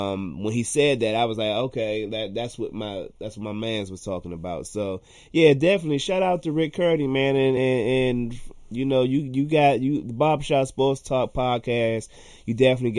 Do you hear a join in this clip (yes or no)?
no